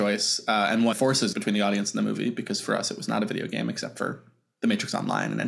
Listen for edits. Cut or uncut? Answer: cut